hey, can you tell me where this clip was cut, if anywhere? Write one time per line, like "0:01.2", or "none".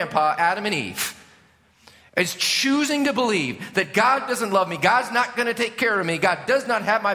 none